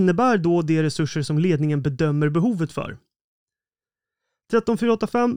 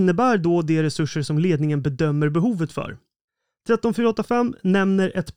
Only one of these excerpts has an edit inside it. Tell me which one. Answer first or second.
second